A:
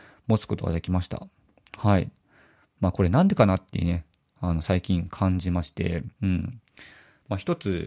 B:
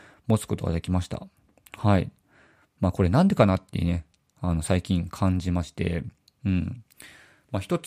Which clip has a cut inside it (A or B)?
A